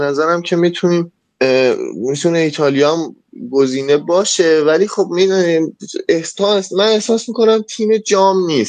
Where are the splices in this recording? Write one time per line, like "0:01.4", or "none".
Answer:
none